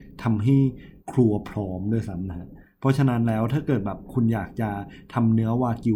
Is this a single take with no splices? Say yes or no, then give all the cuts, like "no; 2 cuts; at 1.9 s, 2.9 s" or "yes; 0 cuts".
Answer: no; 1 cut; at 1.0 s